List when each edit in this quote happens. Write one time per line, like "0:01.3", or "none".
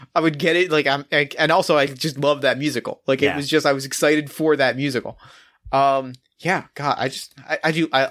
none